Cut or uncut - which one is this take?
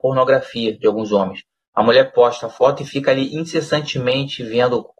uncut